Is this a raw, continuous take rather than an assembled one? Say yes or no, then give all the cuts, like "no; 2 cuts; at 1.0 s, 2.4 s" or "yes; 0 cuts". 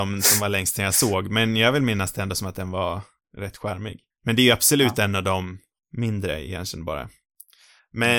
yes; 0 cuts